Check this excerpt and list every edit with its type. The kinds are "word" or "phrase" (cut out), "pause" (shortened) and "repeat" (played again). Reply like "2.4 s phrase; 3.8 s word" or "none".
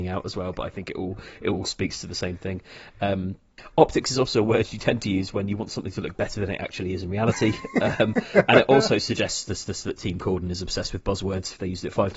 9.6 s repeat